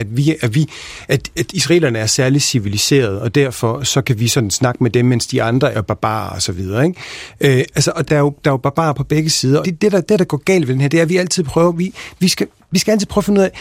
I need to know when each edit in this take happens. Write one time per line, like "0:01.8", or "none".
0:05.7
0:08.1
0:09.6